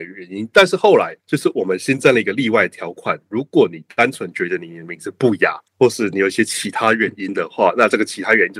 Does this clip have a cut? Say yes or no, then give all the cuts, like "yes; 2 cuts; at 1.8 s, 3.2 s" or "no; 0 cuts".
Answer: yes; 2 cuts; at 1.2 s, 5.7 s